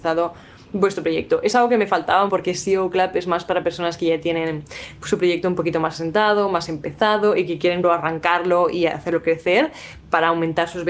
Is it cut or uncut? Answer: cut